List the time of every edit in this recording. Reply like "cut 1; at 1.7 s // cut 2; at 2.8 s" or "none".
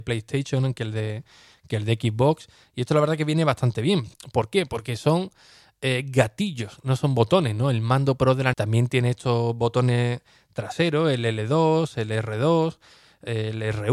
cut 1; at 8.5 s